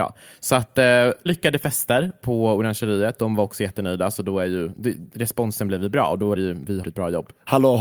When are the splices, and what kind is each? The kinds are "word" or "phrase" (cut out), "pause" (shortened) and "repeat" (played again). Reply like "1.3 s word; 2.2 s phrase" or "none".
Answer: 1.3 s word; 6.4 s word; 6.8 s word